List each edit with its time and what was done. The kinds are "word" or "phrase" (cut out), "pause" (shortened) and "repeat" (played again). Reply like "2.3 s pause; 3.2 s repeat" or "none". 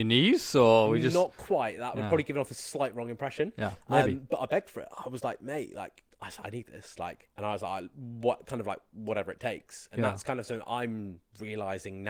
6.1 s pause; 7.3 s pause